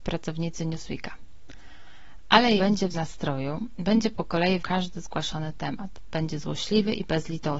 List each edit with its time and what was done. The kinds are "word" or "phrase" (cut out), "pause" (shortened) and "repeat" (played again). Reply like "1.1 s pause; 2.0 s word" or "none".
2.6 s word; 2.9 s word; 4.6 s word